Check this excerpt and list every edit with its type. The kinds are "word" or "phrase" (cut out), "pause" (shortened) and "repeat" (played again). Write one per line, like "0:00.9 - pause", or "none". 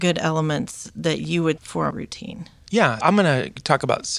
0:01.6 - word
0:01.9 - word
0:03.0 - word